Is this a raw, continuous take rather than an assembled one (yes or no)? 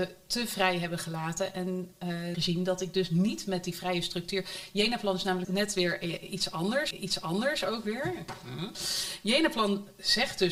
no